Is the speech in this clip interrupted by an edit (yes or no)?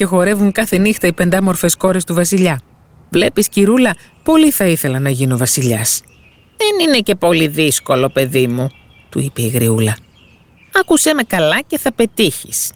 no